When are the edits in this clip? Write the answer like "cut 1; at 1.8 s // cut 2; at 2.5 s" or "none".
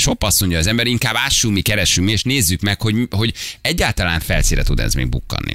none